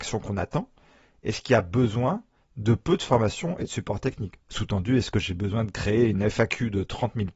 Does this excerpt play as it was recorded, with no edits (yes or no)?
yes